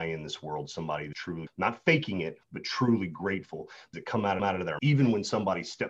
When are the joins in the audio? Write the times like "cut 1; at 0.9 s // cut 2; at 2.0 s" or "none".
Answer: cut 1; at 1.1 s // cut 2; at 1.5 s // cut 3; at 2.4 s // cut 4; at 3.9 s // cut 5; at 4.4 s // cut 6; at 4.8 s